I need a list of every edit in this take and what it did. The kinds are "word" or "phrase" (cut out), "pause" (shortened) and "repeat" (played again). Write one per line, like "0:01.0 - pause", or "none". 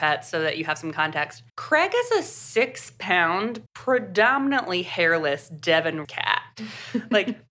0:01.5 - pause
0:03.7 - pause
0:06.0 - word